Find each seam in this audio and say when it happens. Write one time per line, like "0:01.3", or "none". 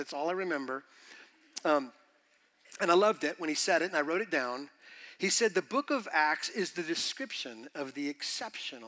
none